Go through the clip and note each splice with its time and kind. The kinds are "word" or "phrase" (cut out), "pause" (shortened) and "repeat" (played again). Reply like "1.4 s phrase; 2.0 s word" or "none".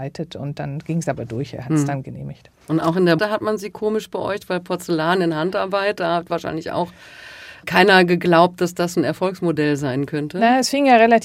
2.6 s pause; 3.2 s word